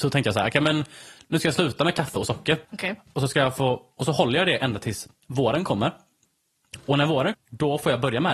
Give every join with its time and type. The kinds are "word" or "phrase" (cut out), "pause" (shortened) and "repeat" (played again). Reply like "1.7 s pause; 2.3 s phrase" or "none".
2.6 s pause; 7.3 s word